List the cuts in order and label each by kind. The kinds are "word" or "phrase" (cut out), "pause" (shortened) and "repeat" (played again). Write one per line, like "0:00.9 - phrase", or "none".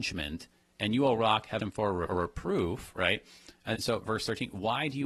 0:01.6 - word
0:02.0 - word
0:03.7 - word